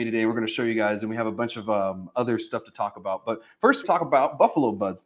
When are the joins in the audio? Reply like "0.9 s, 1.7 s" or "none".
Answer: 3.8 s